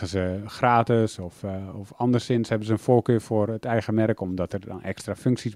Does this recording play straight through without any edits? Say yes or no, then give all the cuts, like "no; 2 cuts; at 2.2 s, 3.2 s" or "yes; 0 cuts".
yes; 0 cuts